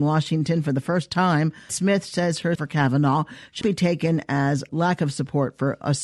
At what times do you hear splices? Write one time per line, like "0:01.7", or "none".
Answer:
0:01.7
0:02.6
0:03.6
0:04.7